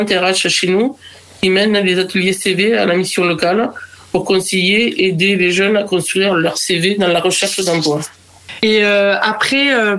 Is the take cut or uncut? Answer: uncut